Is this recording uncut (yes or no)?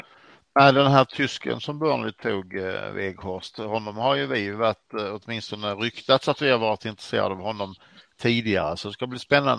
yes